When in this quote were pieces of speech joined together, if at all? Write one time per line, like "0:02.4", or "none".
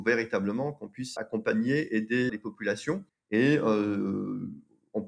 0:01.2
0:02.3
0:03.1